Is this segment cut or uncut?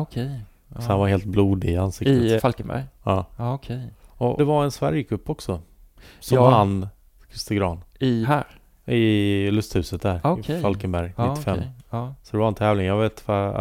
cut